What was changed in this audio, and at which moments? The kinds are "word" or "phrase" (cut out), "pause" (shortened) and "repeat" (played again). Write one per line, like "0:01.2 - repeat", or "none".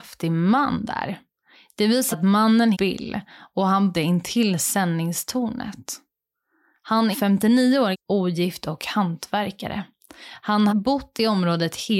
0:02.1 - word
0:02.7 - word
0:03.9 - word
0:07.1 - word
0:07.9 - word
0:10.7 - word